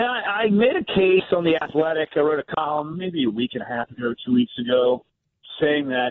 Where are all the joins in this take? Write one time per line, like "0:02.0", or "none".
none